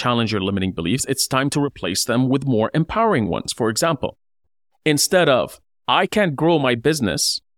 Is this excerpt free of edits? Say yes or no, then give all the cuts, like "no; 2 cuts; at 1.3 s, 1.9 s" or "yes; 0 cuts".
yes; 0 cuts